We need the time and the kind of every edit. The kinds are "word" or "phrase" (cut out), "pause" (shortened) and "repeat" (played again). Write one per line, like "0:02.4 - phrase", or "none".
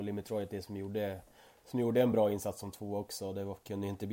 none